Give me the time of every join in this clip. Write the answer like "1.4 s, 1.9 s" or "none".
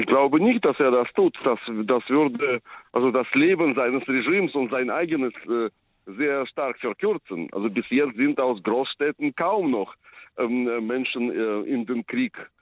none